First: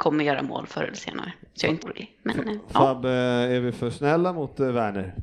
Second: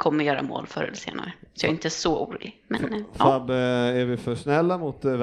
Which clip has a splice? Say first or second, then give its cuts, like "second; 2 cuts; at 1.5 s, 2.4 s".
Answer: first; 1 cut; at 1.8 s